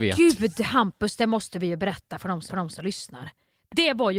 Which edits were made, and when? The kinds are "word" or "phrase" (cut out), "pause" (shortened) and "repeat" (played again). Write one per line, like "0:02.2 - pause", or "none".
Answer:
0:02.5 - repeat

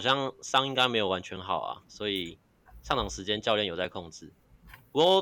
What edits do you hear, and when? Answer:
none

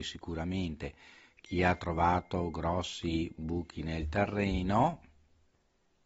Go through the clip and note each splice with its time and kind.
none

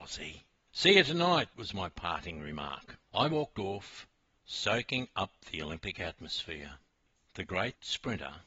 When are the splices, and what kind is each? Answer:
none

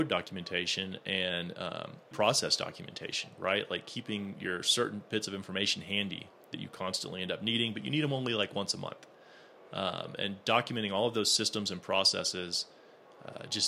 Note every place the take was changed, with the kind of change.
0:02.1 - word

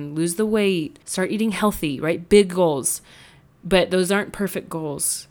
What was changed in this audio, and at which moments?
0:01.0 - pause

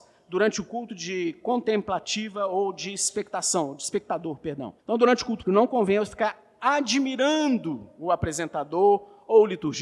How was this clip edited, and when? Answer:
0:04.8 - pause
0:05.4 - word

